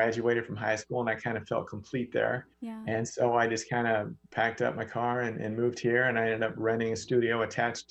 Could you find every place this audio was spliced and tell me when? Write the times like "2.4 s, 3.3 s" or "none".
2.5 s, 4.2 s